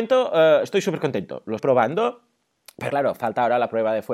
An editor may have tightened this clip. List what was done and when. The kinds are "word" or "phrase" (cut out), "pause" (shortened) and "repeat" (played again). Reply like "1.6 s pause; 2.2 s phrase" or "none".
1.6 s word; 2.9 s word